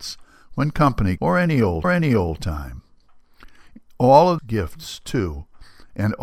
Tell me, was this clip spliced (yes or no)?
yes